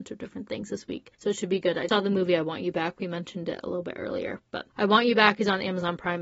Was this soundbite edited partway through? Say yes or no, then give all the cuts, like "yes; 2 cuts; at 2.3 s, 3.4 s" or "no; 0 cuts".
yes; 3 cuts; at 1.1 s, 1.9 s, 4.7 s